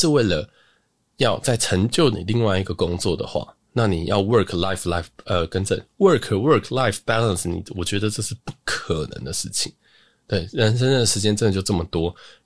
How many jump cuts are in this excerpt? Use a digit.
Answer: 1